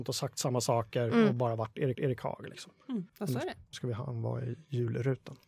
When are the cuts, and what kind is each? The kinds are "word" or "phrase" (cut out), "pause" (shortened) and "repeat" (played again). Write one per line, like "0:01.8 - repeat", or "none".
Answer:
0:01.9 - repeat
0:03.1 - pause
0:03.7 - word